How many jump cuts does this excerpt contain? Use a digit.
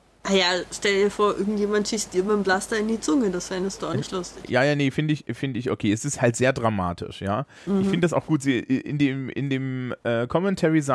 1